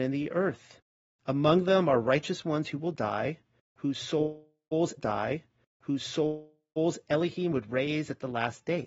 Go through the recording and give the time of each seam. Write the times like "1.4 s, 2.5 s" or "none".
5.0 s